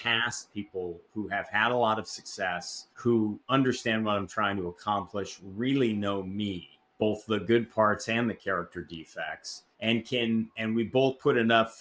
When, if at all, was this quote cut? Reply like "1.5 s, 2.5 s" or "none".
2.9 s, 9.7 s